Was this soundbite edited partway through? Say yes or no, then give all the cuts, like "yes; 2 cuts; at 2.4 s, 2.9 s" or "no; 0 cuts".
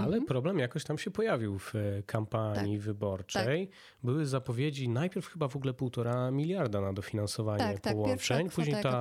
no; 0 cuts